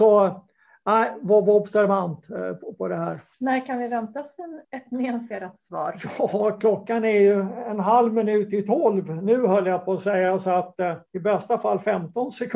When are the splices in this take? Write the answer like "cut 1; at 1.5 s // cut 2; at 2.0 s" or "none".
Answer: cut 1; at 2.7 s // cut 2; at 3.3 s // cut 3; at 4.6 s // cut 4; at 11.1 s